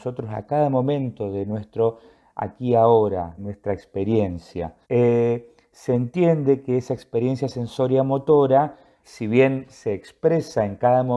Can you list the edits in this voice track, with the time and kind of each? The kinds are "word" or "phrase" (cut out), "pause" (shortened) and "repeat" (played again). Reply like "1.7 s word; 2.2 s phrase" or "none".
3.4 s phrase; 4.8 s pause; 9.0 s word